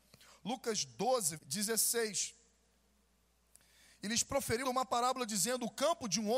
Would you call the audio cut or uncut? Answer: cut